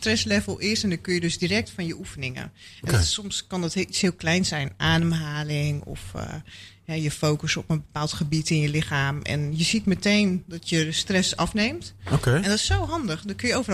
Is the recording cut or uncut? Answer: cut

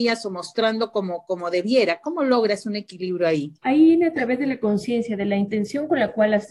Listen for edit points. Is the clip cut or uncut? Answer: cut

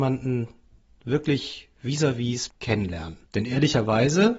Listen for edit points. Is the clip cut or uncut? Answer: cut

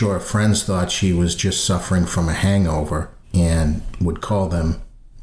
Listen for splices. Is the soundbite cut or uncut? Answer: cut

